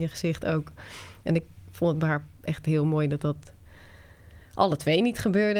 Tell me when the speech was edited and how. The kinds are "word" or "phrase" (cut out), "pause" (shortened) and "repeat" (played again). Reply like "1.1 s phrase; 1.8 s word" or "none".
2.4 s pause